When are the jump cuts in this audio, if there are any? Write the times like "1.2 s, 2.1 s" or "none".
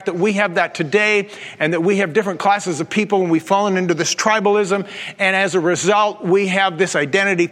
none